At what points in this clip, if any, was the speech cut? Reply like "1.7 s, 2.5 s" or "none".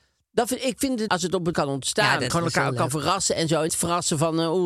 1.1 s, 1.5 s, 2.3 s, 3.7 s